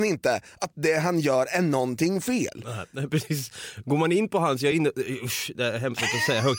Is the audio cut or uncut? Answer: uncut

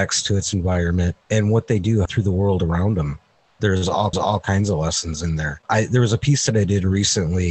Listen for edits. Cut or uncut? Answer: cut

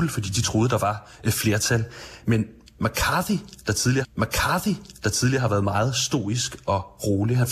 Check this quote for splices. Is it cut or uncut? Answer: cut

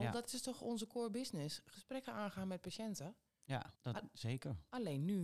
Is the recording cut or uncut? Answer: cut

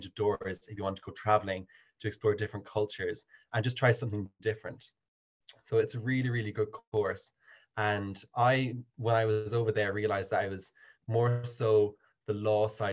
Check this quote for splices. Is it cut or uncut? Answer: uncut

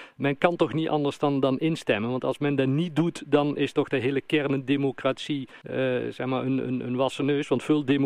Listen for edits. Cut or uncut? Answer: cut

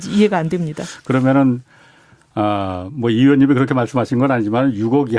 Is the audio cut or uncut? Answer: uncut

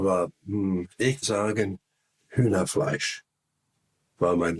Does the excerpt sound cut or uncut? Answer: cut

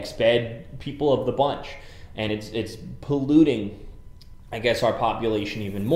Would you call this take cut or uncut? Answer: uncut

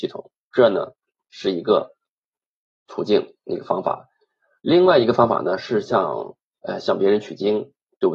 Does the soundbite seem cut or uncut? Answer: uncut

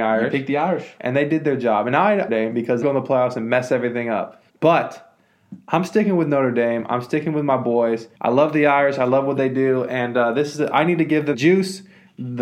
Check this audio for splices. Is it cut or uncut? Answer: cut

